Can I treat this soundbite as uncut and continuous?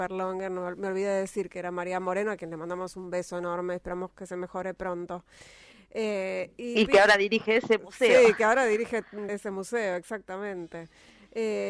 no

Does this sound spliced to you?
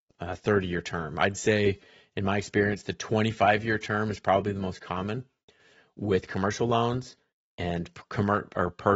no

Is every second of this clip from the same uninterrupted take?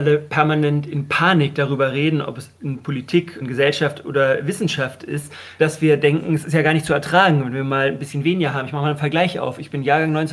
yes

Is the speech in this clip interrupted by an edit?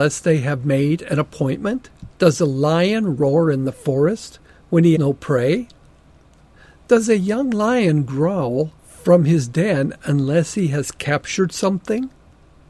yes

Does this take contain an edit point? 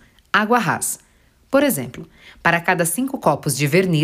no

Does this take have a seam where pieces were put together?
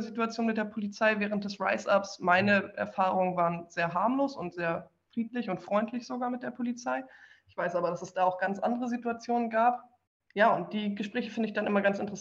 no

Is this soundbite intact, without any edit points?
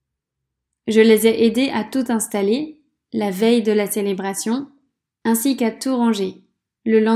yes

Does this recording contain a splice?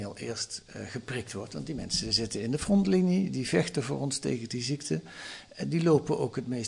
no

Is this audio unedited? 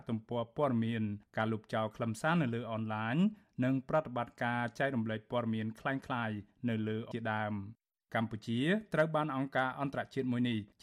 no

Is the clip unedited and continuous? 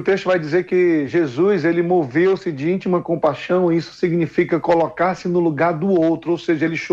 yes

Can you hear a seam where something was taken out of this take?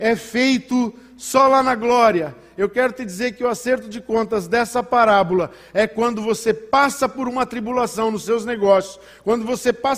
no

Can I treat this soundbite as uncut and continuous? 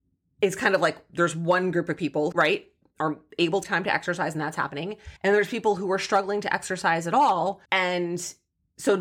no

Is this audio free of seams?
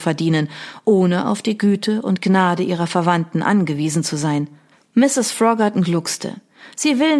yes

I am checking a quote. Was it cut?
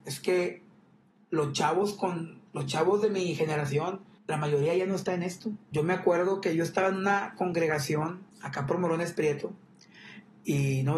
yes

